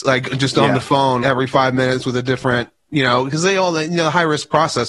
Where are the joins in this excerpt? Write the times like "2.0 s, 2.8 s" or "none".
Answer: 1.2 s